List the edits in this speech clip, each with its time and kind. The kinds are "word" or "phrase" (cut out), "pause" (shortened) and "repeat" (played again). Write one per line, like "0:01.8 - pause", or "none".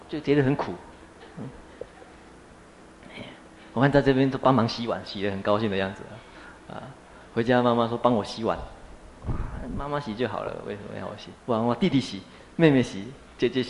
0:11.4 - pause